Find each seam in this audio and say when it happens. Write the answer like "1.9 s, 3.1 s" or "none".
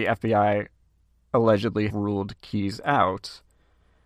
1.9 s